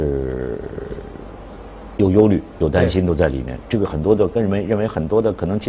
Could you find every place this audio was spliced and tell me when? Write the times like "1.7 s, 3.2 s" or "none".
none